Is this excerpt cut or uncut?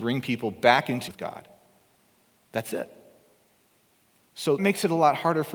cut